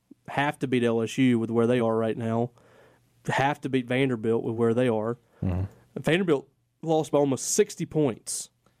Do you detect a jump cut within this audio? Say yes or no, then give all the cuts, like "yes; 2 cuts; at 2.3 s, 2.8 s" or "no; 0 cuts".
no; 0 cuts